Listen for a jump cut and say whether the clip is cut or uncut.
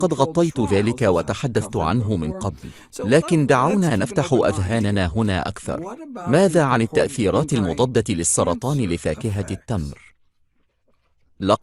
uncut